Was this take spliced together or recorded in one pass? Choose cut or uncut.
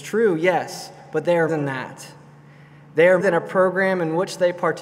cut